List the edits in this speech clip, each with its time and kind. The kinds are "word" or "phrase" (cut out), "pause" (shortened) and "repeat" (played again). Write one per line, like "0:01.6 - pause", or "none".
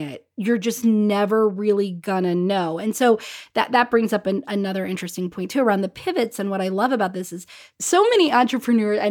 none

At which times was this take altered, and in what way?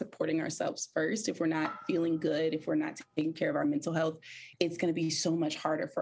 0:04.5 - pause

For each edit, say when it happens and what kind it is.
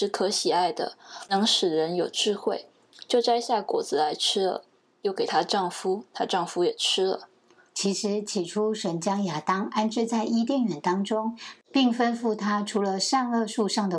none

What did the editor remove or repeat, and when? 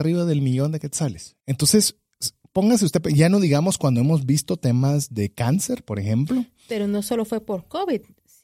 0:01.4 - pause

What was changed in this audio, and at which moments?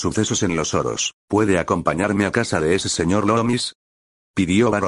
0:01.2 - pause

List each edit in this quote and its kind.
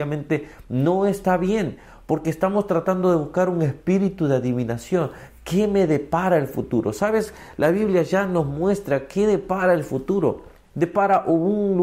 none

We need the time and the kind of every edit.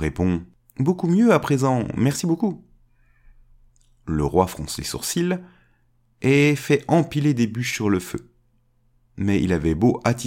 none

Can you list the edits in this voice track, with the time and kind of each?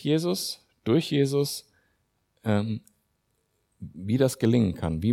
none

